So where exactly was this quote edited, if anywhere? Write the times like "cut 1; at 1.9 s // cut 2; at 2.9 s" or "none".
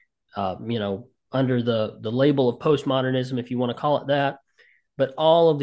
none